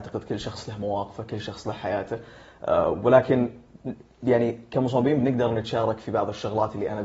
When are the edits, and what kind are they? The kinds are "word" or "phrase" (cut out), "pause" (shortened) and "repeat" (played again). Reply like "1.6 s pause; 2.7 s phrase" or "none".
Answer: none